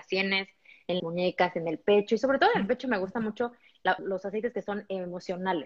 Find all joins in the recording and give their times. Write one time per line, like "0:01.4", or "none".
0:01.0
0:04.0